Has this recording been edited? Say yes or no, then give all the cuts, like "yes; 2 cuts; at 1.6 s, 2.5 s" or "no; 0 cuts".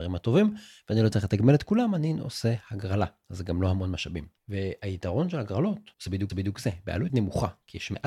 yes; 4 cuts; at 4.4 s, 5.9 s, 6.3 s, 7.1 s